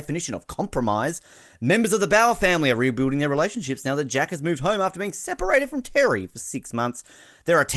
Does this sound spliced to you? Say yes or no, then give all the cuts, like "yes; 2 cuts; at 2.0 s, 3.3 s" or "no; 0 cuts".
no; 0 cuts